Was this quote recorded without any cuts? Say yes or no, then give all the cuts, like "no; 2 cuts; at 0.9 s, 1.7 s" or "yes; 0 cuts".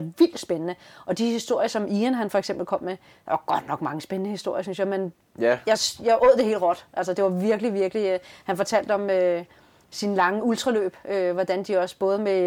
yes; 0 cuts